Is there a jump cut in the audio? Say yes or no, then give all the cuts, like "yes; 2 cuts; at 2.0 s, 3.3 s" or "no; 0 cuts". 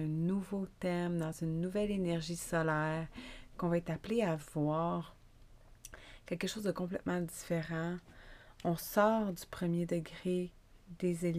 no; 0 cuts